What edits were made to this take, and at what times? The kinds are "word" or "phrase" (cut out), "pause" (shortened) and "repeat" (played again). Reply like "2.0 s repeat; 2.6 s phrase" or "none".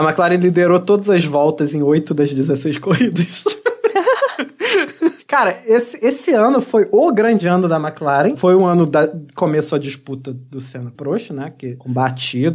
10.9 s word

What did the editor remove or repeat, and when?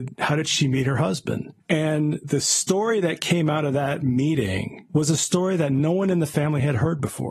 none

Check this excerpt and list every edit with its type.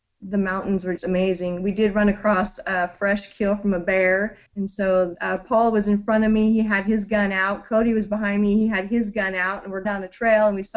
1.0 s word; 4.5 s pause; 5.1 s phrase; 9.8 s word

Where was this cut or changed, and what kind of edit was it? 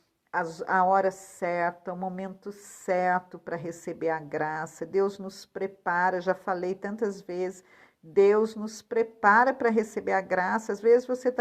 none

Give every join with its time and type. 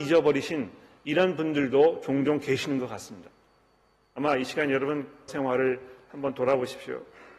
5.3 s phrase

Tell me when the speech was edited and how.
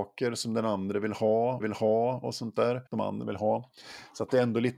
1.6 s repeat; 2.9 s pause; 3.2 s word

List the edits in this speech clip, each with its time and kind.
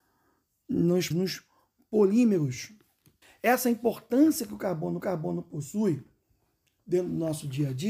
1.1 s word; 3.2 s pause; 5.0 s repeat

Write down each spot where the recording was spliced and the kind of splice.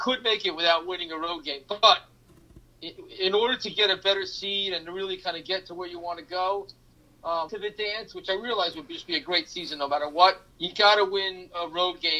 7.5 s phrase; 10.5 s pause

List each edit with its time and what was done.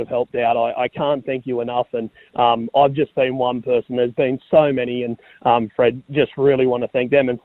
none

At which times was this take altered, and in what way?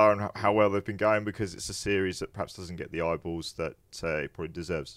none

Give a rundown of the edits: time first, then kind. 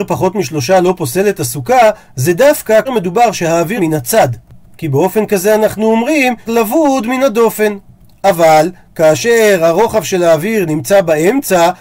2.9 s word; 3.8 s word; 6.5 s word

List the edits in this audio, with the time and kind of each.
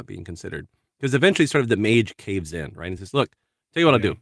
none

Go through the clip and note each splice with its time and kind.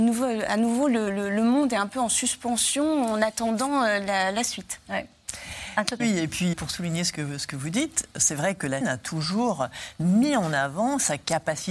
6.0 s word; 6.5 s word; 8.8 s word

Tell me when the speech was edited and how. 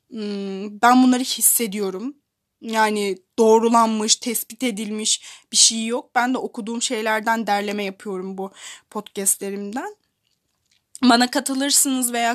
none

